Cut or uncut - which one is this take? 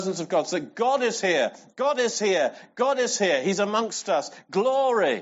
uncut